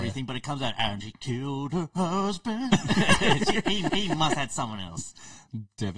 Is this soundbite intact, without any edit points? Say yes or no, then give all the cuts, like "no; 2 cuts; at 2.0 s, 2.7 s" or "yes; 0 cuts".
no; 2 cuts; at 1.0 s, 3.9 s